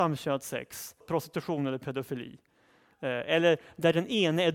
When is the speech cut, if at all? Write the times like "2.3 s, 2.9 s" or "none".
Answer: 1.0 s